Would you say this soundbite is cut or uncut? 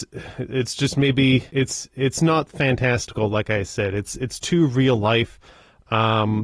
cut